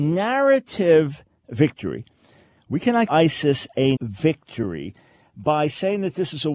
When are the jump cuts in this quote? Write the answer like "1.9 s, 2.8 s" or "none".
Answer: 3.1 s, 4.0 s